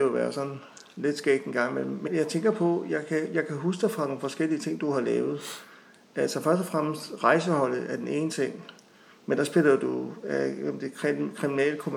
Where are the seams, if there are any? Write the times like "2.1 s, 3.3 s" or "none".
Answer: 2.1 s